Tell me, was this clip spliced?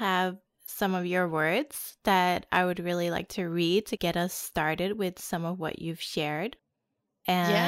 no; 0 cuts

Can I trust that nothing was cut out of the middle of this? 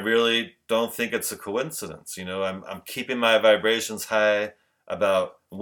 yes; 0 cuts

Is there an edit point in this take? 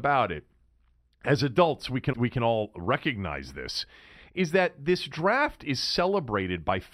yes; 1 cut; at 2.1 s

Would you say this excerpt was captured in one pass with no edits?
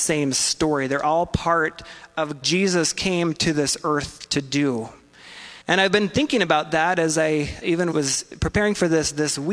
no; 4 cuts; at 2.4 s, 5.6 s, 7.6 s, 7.9 s

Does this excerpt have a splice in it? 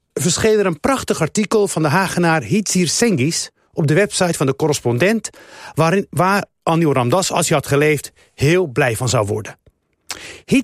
no; 0 cuts

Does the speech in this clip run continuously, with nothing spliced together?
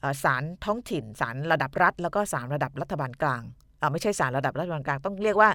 yes; 0 cuts

